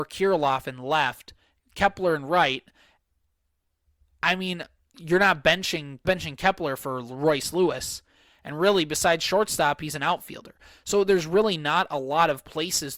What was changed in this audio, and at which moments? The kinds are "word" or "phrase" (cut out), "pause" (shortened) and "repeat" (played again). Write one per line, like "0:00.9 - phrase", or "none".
0:06.0 - phrase